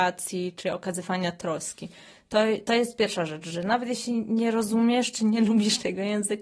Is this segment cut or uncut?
uncut